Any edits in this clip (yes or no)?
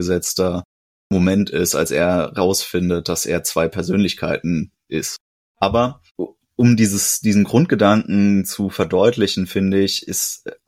no